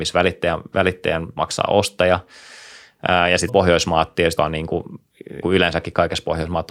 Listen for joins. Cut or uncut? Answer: cut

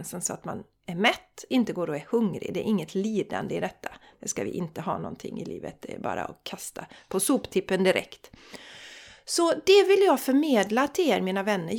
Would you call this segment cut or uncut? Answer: uncut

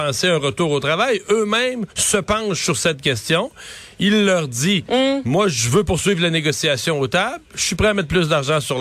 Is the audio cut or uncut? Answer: cut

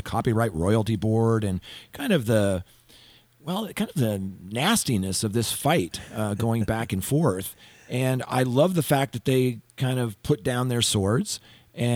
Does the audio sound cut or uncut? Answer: uncut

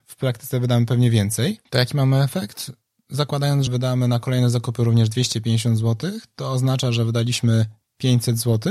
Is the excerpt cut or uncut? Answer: cut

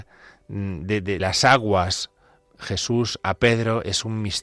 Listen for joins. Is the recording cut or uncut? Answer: cut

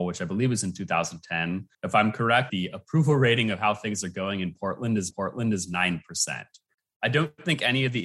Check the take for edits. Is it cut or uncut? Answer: cut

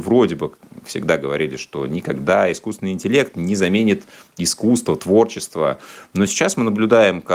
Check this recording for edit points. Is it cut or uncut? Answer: uncut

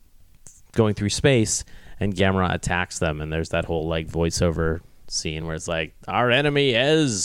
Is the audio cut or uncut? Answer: uncut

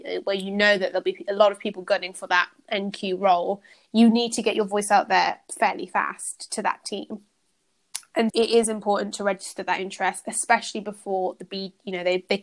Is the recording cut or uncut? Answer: cut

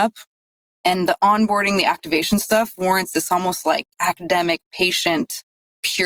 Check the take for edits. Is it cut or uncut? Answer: cut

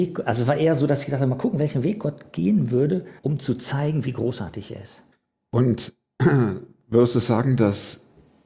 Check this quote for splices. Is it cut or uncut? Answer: cut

